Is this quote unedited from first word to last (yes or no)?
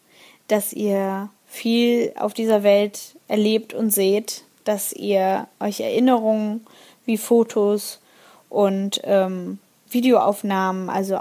yes